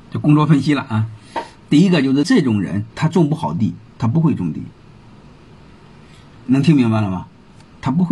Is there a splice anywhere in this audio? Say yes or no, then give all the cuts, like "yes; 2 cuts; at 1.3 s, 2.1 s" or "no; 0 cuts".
yes; 1 cut; at 2.9 s